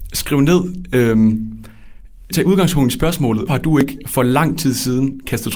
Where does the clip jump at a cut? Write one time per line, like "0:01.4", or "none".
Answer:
0:02.3
0:03.5